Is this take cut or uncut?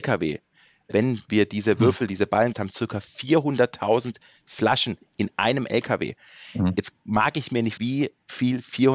cut